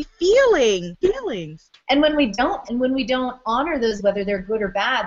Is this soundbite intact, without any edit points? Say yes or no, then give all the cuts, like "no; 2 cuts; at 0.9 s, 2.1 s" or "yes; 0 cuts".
no; 4 cuts; at 1.0 s, 1.8 s, 2.7 s, 4.0 s